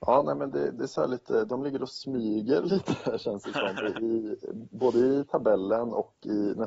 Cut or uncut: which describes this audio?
uncut